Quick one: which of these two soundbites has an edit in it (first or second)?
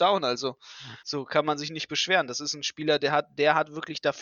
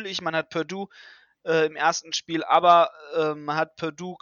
first